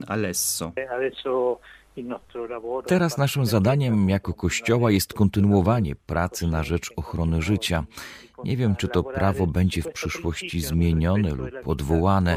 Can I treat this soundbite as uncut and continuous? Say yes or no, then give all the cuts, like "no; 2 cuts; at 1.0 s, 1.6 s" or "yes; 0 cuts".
yes; 0 cuts